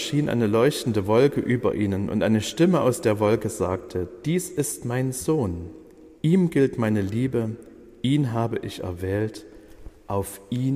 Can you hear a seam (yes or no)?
no